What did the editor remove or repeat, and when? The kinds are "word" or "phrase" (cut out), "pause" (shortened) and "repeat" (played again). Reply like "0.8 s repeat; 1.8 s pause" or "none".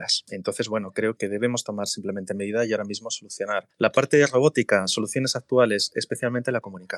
1.2 s word